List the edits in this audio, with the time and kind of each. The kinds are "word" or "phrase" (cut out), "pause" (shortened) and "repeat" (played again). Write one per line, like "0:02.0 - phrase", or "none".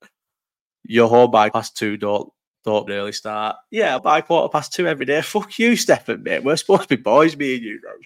0:01.5 - word
0:02.9 - phrase
0:04.0 - word